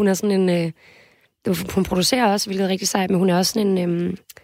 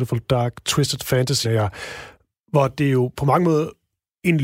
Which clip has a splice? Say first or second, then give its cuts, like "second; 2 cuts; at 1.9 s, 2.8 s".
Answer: second; 1 cut; at 1.4 s